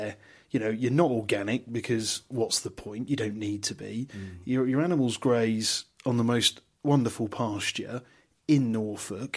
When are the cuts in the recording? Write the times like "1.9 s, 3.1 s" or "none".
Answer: none